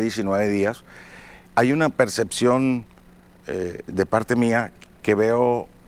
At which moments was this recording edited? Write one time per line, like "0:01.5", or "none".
0:01.4